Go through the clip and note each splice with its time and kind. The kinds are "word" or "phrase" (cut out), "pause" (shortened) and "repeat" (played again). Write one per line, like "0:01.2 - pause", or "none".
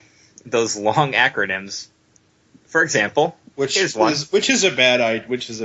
none